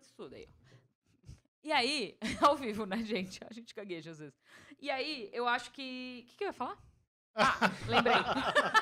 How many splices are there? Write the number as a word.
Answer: zero